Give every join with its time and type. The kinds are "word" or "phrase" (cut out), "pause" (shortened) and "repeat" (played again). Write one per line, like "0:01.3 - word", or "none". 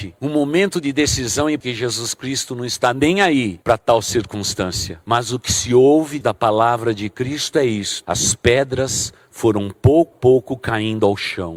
0:01.6 - word
0:06.2 - word
0:10.1 - word